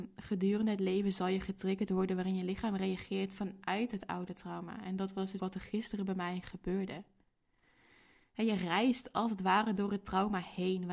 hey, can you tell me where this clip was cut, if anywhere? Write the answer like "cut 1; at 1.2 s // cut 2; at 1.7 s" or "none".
cut 1; at 5.4 s